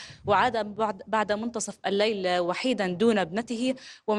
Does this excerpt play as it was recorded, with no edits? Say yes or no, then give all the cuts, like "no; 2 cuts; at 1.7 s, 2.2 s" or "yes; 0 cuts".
yes; 0 cuts